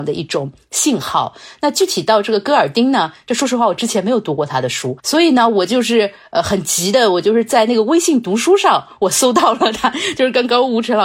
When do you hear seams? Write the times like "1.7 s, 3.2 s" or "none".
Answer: 5.0 s

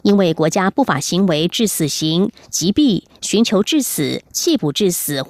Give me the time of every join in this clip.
4.3 s

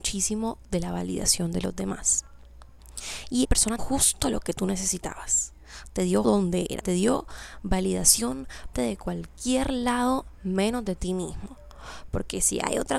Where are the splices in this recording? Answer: 3.4 s, 3.8 s, 6.2 s, 6.8 s, 8.7 s

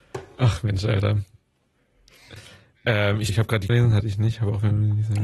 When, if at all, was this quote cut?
3.3 s, 3.7 s

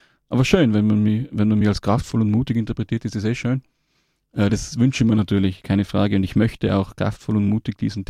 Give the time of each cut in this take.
none

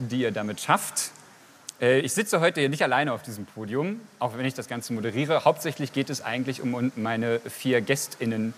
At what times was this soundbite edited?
none

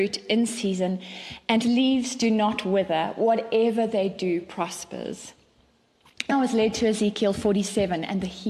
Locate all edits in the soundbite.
1.6 s, 6.3 s

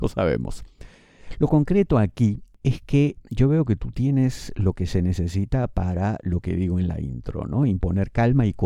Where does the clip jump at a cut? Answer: none

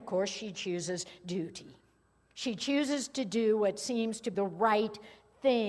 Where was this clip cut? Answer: 4.3 s

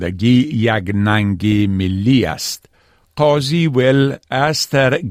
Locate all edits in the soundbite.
none

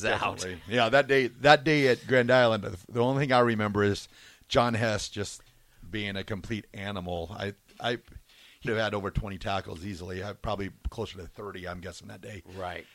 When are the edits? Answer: 8.7 s

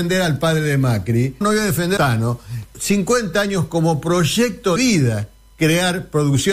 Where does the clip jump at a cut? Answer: 1.4 s, 2.0 s, 2.7 s, 4.8 s

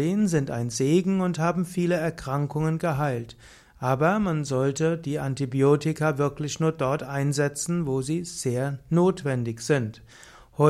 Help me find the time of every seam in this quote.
none

